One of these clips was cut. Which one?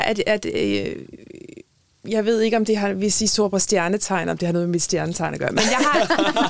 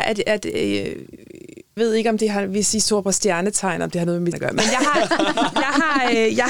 second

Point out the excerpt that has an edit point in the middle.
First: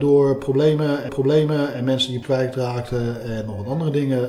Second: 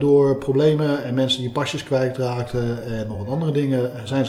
first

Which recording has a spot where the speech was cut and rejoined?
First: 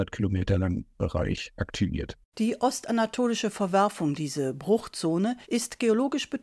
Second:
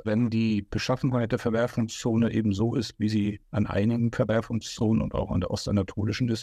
first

